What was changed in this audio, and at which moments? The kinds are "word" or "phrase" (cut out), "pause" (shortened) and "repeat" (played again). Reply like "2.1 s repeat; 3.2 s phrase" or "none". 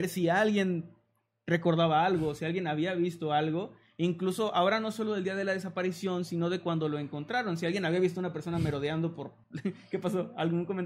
9.4 s pause